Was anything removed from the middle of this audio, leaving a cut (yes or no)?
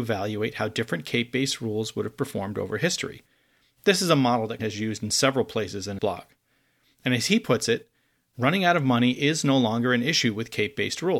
yes